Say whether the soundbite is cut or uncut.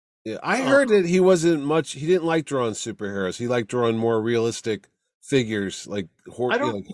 cut